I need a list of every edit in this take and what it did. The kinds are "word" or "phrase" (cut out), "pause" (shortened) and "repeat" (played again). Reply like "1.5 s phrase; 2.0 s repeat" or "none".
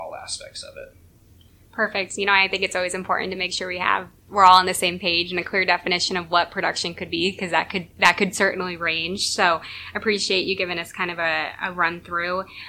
none